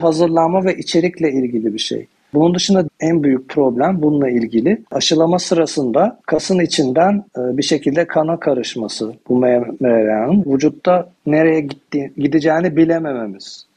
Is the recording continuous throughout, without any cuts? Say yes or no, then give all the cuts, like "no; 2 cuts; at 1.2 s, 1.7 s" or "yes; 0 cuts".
no; 6 cuts; at 2.9 s, 4.9 s, 6.2 s, 7.3 s, 10.4 s, 11.2 s